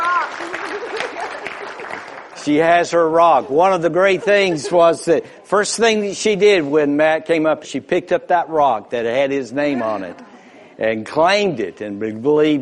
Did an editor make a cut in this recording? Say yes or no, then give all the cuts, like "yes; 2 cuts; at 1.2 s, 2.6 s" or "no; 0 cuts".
yes; 1 cut; at 7.6 s